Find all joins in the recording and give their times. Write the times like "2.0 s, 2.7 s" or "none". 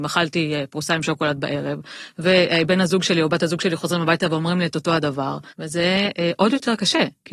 5.5 s